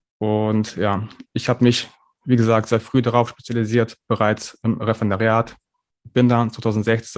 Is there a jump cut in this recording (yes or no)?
no